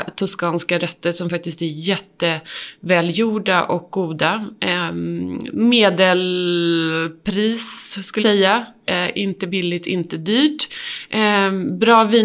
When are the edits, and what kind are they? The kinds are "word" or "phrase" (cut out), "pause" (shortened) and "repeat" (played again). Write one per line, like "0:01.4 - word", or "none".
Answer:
0:08.2 - word